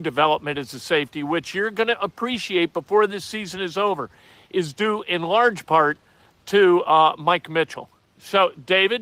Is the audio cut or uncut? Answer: uncut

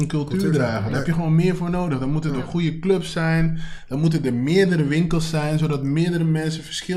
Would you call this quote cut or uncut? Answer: uncut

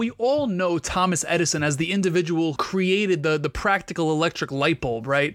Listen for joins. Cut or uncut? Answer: cut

